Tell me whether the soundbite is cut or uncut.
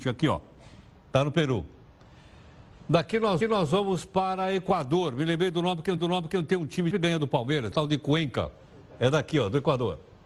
cut